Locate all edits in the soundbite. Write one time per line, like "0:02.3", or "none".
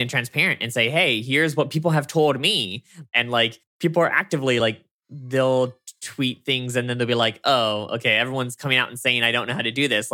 none